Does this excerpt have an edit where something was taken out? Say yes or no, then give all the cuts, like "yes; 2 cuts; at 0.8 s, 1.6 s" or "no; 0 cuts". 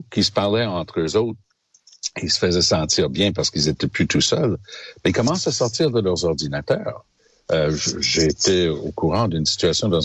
no; 0 cuts